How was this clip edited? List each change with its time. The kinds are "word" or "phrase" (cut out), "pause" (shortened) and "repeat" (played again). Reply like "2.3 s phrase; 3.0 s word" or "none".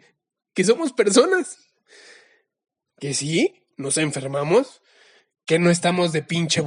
none